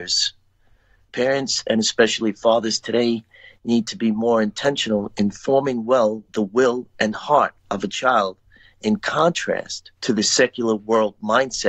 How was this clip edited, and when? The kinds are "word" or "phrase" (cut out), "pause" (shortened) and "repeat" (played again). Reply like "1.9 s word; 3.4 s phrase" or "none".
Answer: 7.6 s pause; 10.0 s pause